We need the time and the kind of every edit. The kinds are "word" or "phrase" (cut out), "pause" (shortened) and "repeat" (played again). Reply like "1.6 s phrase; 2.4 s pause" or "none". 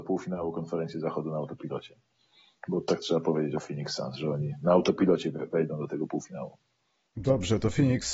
none